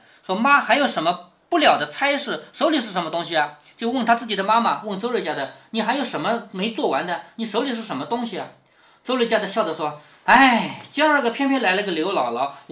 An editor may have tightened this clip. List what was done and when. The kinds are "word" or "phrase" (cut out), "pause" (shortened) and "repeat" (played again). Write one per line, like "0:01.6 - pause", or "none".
none